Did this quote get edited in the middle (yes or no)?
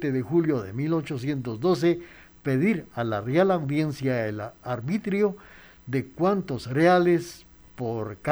no